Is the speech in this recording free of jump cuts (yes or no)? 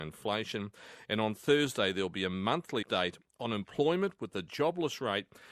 no